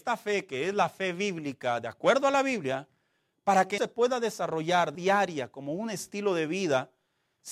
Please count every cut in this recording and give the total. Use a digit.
2